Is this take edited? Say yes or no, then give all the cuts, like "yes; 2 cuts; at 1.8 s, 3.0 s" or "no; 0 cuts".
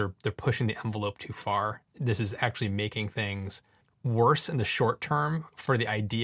yes; 1 cut; at 3.8 s